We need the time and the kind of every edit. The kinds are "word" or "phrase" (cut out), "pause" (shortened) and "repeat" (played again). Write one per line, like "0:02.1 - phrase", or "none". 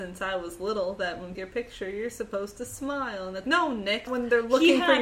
0:01.3 - phrase
0:03.4 - word
0:04.1 - word